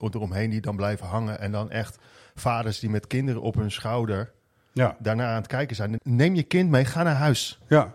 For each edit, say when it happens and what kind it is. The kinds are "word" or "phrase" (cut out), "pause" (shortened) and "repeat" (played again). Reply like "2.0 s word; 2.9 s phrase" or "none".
6.0 s word